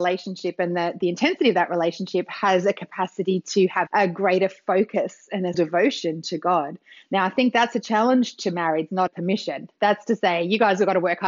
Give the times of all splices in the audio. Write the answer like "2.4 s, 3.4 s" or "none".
3.9 s, 5.5 s, 9.1 s